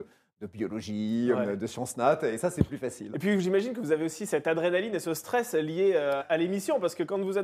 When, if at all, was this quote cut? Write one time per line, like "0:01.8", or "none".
0:06.2